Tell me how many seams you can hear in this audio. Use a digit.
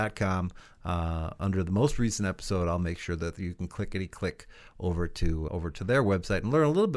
1